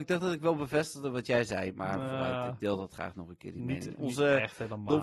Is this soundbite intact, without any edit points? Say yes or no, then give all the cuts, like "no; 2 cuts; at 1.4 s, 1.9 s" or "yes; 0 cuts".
yes; 0 cuts